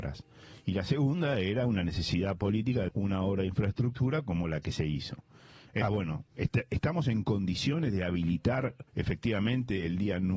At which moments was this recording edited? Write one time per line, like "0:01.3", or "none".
0:02.9
0:05.8
0:06.3
0:08.9

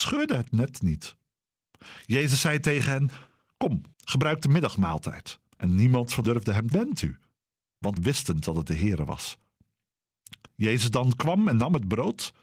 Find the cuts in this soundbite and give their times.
0:03.9
0:05.5
0:06.2
0:06.7
0:08.0

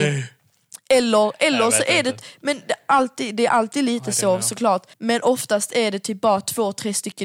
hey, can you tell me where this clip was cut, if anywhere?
0:04.9

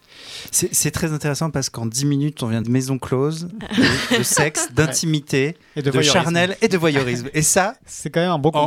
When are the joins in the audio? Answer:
0:02.6

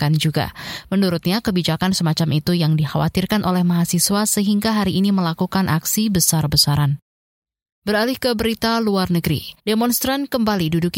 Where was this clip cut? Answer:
0:09.6

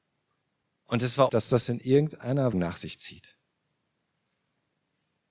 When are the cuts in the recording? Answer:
0:01.3
0:02.5

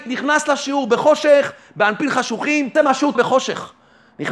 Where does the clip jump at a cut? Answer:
0:02.8
0:03.2

